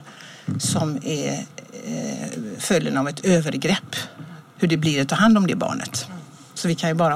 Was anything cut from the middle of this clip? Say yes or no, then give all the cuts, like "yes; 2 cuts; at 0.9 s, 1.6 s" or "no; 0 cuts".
no; 0 cuts